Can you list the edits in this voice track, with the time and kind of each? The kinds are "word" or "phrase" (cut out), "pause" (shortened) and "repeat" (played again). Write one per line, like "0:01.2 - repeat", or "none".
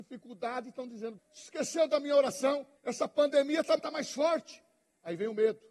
0:01.2 - word
0:02.8 - pause
0:03.8 - word